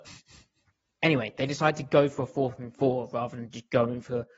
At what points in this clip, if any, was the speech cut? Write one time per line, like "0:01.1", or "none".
none